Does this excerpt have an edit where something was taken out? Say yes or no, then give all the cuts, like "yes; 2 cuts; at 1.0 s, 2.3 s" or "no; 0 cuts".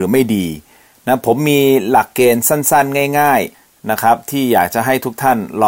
yes; 1 cut; at 3.5 s